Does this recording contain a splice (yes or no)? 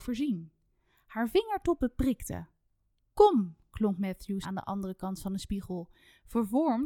yes